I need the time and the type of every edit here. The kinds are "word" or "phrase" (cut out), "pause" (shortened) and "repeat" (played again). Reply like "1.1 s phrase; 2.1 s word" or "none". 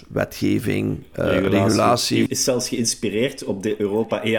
2.3 s phrase